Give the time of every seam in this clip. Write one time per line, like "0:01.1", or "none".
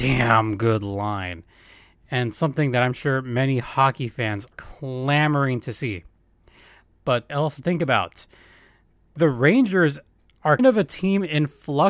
0:04.5
0:07.3
0:10.6

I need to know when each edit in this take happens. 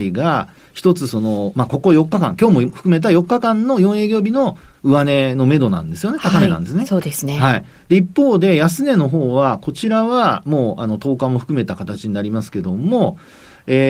none

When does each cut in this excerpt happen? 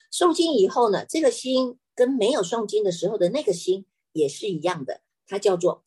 none

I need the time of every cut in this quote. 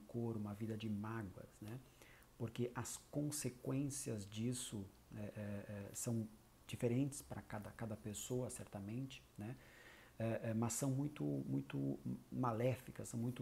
none

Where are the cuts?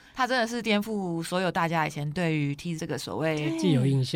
0:02.8

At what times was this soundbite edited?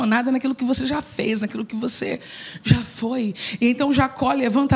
none

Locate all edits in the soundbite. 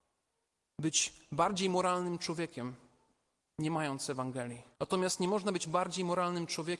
0:04.7

